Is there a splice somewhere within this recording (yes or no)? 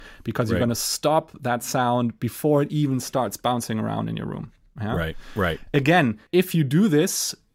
yes